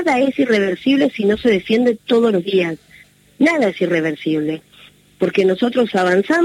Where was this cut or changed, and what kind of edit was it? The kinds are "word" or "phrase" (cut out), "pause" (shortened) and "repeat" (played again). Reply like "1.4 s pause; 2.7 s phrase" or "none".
none